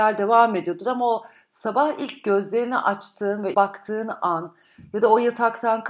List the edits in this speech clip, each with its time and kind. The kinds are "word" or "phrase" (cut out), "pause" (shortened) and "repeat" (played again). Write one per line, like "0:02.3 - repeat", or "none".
0:03.5 - word